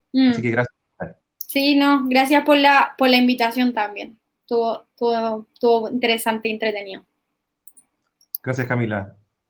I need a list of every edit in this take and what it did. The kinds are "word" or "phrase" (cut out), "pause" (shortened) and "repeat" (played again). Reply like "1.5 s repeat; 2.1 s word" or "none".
1.2 s pause

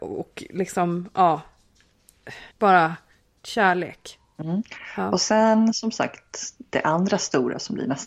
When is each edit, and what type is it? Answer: 2.5 s pause

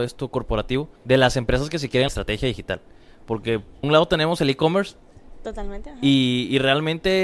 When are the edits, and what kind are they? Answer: 1.0 s pause; 2.1 s phrase; 3.8 s word

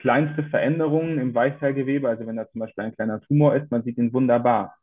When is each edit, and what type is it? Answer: none

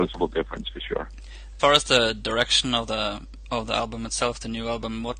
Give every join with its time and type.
1.6 s word

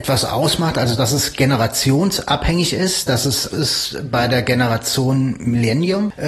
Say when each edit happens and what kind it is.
3.5 s word

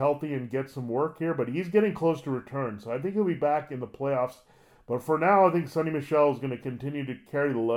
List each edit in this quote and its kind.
none

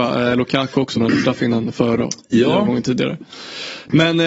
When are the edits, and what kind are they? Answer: 0.9 s word; 2.0 s word

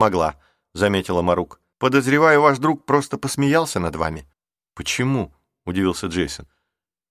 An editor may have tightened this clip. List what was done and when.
1.7 s pause; 4.3 s pause

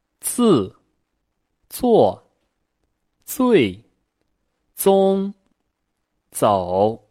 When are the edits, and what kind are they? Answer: none

